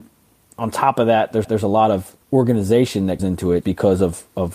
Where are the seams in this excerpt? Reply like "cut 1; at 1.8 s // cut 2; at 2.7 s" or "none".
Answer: cut 1; at 1.4 s // cut 2; at 2.2 s // cut 3; at 3.2 s // cut 4; at 3.6 s